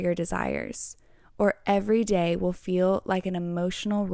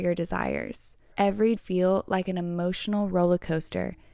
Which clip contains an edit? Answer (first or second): second